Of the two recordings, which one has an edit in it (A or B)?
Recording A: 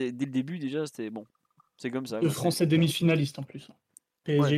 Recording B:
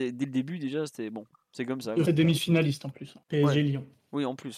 B